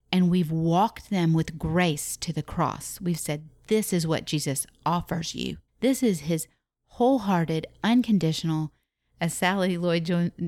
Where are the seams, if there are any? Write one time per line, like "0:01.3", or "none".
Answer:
0:05.7